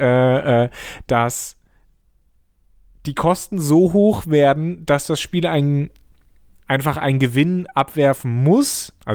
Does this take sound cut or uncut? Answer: uncut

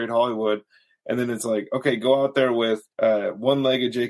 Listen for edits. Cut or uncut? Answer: cut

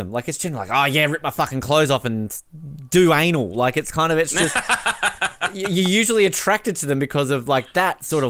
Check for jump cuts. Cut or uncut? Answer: uncut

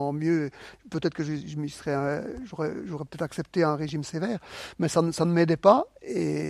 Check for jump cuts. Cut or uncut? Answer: uncut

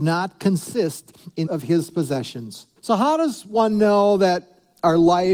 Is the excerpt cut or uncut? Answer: cut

